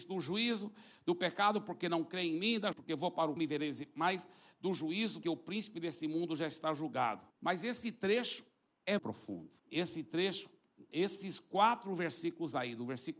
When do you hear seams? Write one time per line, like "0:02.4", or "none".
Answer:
0:02.7
0:03.4
0:05.2
0:07.3
0:09.0
0:09.6